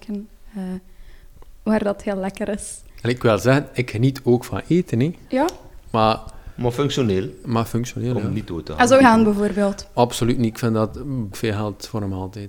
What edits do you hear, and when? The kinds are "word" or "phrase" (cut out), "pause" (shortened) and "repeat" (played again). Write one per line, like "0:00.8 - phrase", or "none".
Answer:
0:09.0 - phrase
0:11.3 - word